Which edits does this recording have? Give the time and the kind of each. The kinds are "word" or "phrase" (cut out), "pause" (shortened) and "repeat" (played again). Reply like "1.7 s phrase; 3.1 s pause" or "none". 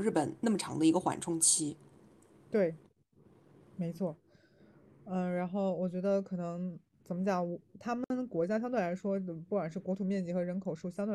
none

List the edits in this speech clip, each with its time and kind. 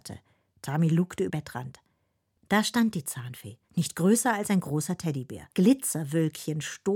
1.3 s word; 3.6 s pause; 5.5 s pause

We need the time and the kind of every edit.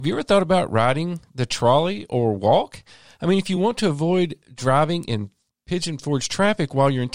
none

